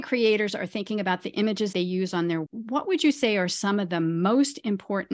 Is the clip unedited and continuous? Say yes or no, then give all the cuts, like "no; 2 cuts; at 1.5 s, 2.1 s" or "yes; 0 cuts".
no; 2 cuts; at 1.7 s, 2.5 s